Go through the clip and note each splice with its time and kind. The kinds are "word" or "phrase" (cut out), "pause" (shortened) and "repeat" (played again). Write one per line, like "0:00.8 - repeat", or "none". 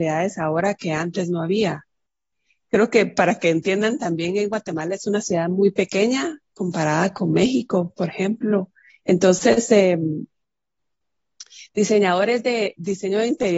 0:08.9 - pause